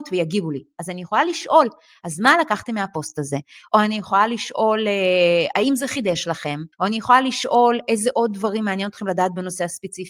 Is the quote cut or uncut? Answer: cut